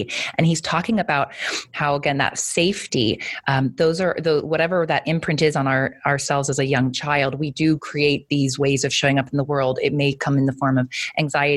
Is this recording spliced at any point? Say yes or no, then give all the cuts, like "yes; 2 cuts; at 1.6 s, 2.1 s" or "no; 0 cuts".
no; 0 cuts